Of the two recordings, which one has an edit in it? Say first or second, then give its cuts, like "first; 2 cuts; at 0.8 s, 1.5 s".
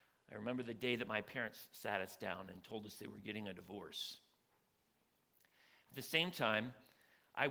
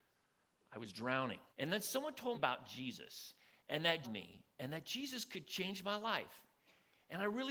second; 3 cuts; at 1.5 s, 2.3 s, 4.0 s